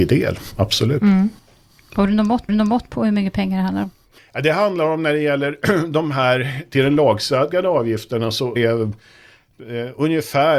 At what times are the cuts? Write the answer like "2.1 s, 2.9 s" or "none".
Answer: 2.5 s, 8.6 s